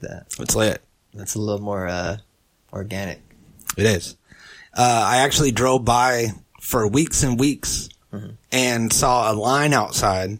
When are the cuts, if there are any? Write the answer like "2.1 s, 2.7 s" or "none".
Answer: none